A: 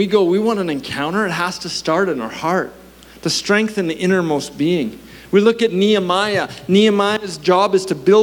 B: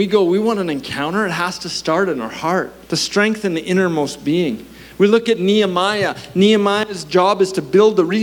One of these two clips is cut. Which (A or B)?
B